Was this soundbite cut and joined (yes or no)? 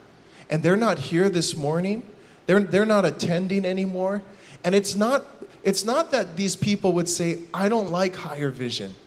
no